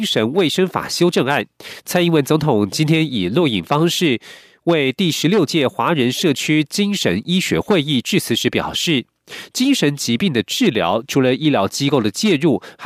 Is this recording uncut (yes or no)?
yes